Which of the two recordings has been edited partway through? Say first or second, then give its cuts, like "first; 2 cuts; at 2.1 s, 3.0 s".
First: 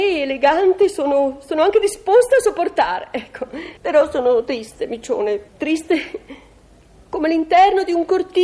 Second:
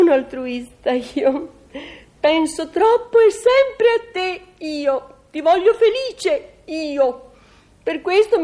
first; 2 cuts; at 3.8 s, 5.5 s